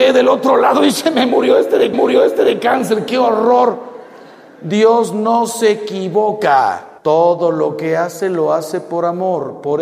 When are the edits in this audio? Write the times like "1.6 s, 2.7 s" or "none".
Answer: 1.9 s, 7.0 s